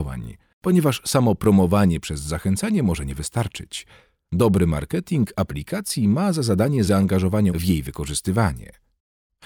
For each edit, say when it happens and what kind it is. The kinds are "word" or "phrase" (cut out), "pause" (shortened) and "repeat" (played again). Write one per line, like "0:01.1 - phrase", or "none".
0:06.9 - word
0:07.5 - word